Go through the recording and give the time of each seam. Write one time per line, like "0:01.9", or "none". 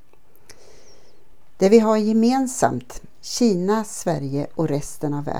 none